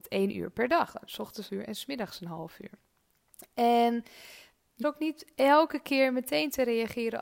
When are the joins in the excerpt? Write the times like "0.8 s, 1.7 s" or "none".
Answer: 1.5 s, 4.8 s

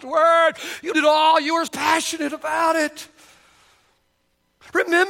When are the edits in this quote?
0.9 s, 1.7 s

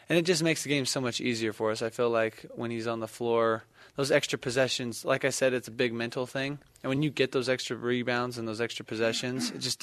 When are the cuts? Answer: none

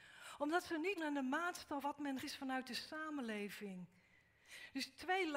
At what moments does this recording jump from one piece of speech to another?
1.0 s, 1.8 s, 2.2 s

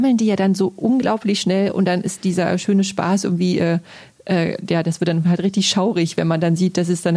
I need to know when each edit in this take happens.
none

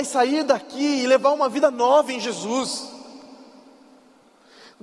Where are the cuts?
none

